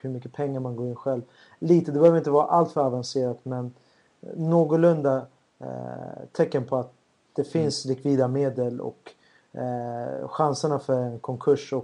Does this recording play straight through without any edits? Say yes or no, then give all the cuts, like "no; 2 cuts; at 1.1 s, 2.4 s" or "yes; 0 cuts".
yes; 0 cuts